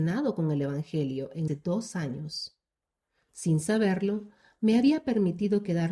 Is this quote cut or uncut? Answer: cut